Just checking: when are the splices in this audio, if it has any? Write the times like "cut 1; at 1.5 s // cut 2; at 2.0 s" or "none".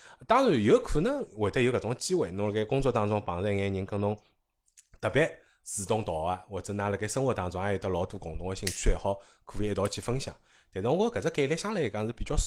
none